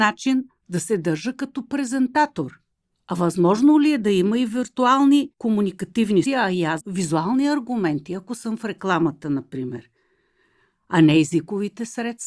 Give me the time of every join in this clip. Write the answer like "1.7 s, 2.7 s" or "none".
2.8 s, 6.3 s, 6.8 s